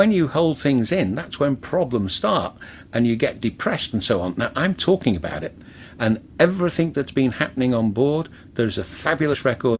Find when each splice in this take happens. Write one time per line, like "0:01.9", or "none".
none